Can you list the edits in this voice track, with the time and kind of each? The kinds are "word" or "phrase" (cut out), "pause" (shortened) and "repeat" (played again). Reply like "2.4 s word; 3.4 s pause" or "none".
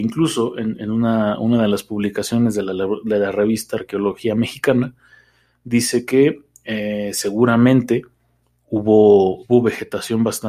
none